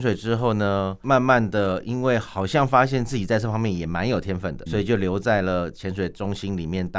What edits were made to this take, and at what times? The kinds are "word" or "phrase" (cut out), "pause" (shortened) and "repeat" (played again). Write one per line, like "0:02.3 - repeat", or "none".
0:04.7 - phrase

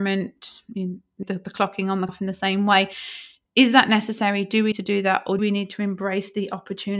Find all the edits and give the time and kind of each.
0:01.2 - word
0:02.1 - word
0:04.7 - word
0:05.4 - word

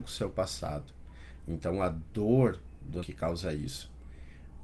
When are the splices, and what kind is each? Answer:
0:03.0 - word

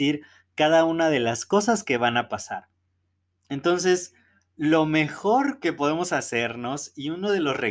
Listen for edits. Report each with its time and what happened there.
none

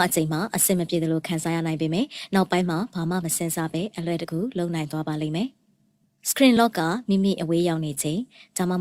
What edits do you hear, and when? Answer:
none

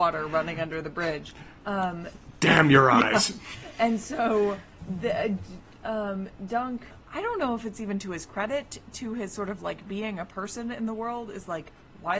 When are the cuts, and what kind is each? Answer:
none

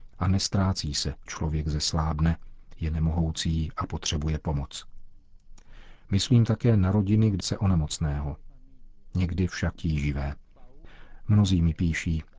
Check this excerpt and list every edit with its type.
0:01.3 - word
0:07.4 - phrase
0:09.8 - phrase

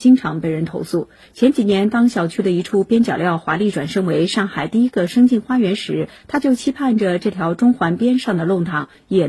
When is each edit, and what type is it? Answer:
none

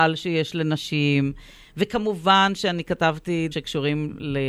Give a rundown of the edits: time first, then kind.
0:03.5 - word

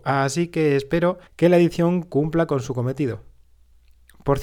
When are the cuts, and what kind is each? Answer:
0:01.3 - pause

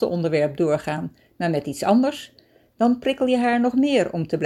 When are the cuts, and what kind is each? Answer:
none

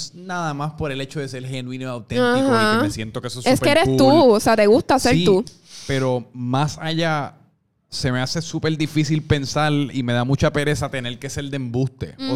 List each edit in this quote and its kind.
none

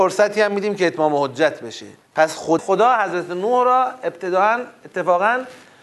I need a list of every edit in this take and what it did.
0:02.0 - pause
0:02.6 - phrase

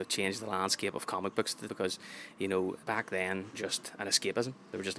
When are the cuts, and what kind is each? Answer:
0:01.7 - word
0:02.8 - word
0:03.5 - phrase

